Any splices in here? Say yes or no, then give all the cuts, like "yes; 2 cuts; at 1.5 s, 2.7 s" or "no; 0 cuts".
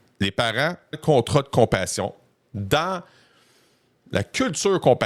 yes; 1 cut; at 0.9 s